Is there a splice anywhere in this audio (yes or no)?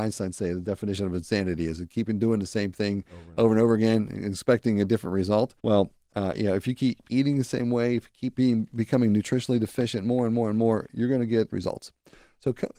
yes